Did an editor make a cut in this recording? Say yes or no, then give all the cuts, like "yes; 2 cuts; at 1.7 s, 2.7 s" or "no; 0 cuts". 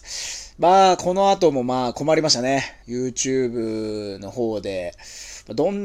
yes; 1 cut; at 2.8 s